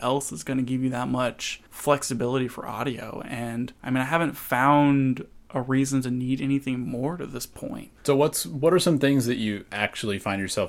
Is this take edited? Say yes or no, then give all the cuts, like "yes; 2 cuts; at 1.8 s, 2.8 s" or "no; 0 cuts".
yes; 3 cuts; at 1.7 s, 3.8 s, 8.0 s